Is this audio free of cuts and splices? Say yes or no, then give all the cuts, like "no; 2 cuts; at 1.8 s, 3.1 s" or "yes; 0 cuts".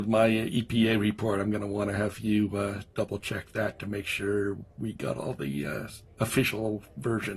yes; 0 cuts